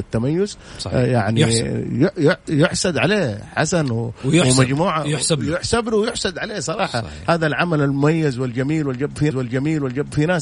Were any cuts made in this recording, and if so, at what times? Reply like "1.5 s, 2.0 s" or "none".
9.3 s